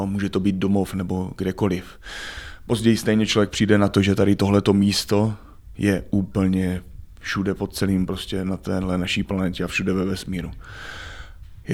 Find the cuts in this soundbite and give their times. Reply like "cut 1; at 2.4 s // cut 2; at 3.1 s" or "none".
none